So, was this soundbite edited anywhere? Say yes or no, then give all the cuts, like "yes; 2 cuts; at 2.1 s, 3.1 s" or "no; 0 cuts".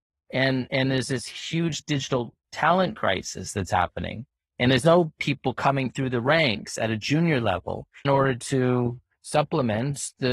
yes; 1 cut; at 8.0 s